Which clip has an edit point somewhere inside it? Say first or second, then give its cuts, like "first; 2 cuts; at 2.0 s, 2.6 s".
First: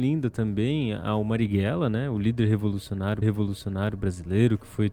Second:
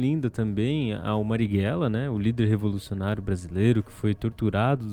first; 1 cut; at 3.2 s